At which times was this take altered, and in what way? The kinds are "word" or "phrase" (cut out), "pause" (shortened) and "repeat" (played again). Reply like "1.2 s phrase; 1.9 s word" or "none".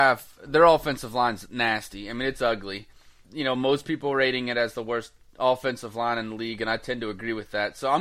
none